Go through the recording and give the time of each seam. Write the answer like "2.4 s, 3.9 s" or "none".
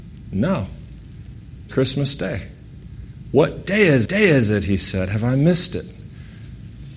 1.7 s, 4.1 s